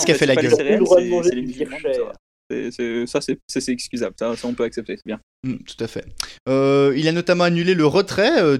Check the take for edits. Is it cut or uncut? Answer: uncut